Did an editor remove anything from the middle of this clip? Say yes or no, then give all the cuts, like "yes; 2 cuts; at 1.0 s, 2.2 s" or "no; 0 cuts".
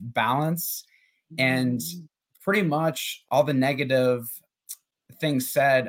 no; 0 cuts